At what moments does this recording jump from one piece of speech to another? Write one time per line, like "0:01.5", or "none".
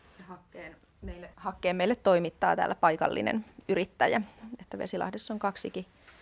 0:01.3